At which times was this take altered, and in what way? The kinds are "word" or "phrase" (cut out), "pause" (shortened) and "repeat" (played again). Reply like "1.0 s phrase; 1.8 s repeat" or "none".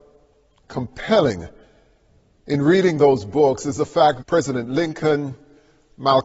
4.2 s word